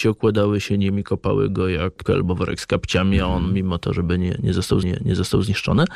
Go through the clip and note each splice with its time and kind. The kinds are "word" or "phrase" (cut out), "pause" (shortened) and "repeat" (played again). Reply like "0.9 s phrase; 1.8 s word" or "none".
2.1 s word; 4.8 s repeat